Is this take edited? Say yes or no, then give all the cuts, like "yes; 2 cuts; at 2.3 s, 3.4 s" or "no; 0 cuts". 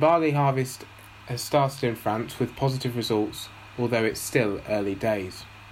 no; 0 cuts